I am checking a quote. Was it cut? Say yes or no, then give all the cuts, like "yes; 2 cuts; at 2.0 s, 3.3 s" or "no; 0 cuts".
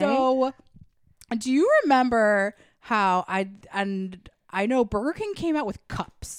no; 0 cuts